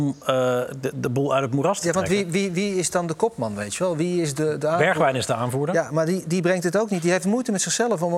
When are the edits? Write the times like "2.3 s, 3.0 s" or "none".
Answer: none